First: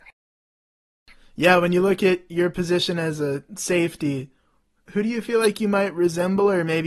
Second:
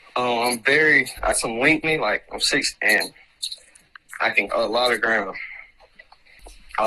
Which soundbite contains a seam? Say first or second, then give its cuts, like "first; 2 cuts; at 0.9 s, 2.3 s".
second; 4 cuts; at 1.3 s, 1.8 s, 2.7 s, 4.5 s